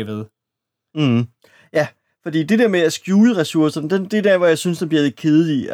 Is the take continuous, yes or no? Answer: yes